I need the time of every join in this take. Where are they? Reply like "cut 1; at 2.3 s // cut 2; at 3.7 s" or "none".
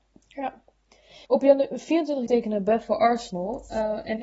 cut 1; at 1.2 s // cut 2; at 2.3 s